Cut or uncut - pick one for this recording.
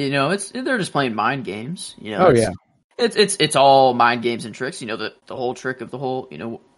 cut